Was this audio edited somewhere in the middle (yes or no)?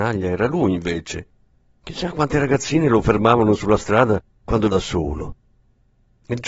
yes